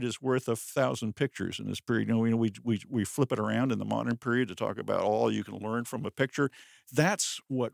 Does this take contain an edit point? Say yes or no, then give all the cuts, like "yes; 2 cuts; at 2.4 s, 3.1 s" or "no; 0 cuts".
no; 0 cuts